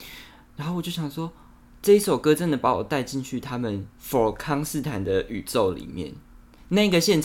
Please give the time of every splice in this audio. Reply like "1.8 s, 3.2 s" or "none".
3.9 s